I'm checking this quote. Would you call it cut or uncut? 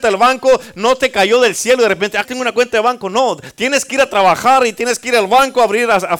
cut